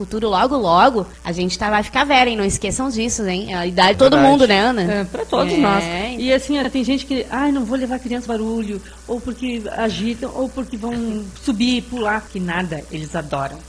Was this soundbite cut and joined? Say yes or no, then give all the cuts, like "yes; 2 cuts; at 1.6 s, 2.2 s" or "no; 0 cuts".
yes; 5 cuts; at 1.1 s, 3.9 s, 8.3 s, 11.4 s, 12.3 s